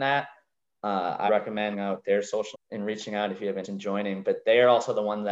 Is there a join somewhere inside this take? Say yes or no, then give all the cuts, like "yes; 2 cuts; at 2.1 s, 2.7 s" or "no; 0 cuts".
yes; 4 cuts; at 1.3 s, 1.7 s, 2.5 s, 3.6 s